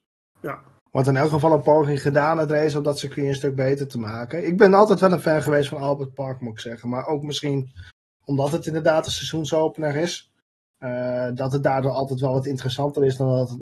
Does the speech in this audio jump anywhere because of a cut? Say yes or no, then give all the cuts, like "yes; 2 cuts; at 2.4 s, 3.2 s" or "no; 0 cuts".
no; 0 cuts